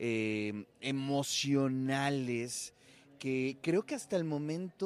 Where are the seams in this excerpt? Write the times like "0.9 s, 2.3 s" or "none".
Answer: none